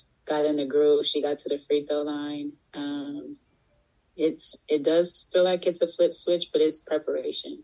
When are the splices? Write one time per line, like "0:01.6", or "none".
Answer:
none